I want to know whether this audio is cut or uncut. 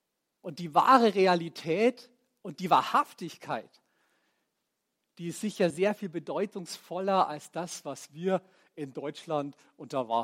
uncut